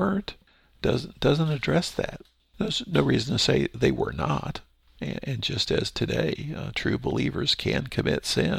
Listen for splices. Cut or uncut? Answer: uncut